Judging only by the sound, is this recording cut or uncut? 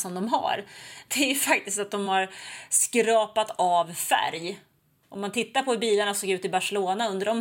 uncut